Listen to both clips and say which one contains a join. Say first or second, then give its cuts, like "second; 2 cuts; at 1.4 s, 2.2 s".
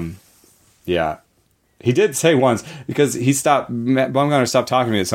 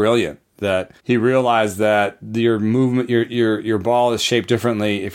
second; 1 cut; at 1.0 s